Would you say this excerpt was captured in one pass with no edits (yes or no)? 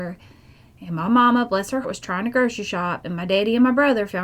no